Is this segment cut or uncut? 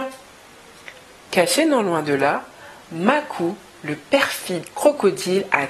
uncut